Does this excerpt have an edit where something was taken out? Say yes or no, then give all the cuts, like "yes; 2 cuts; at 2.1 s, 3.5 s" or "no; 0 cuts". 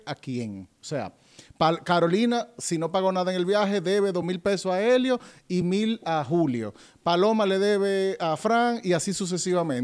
no; 0 cuts